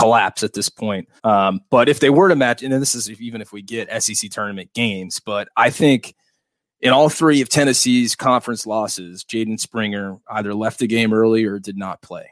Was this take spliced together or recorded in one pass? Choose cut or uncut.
cut